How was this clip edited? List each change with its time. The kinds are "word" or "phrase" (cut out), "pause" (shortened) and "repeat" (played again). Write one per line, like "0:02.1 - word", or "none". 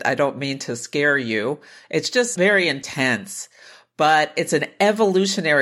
none